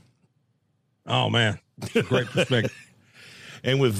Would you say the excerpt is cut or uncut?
uncut